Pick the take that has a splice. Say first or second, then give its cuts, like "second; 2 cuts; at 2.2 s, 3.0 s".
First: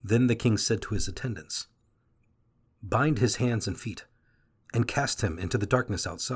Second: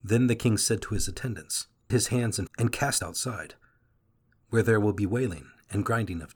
second; 3 cuts; at 1.9 s, 2.5 s, 3.0 s